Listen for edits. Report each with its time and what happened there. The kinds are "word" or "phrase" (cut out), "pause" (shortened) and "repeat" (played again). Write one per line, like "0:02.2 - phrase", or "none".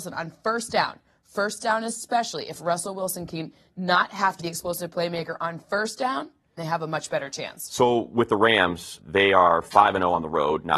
0:04.4 - word
0:06.6 - word
0:09.0 - word